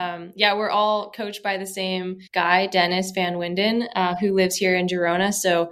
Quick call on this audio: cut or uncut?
cut